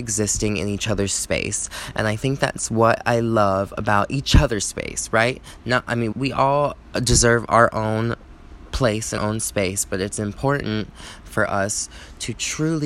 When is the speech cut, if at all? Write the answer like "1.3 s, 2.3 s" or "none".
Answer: 6.1 s, 9.2 s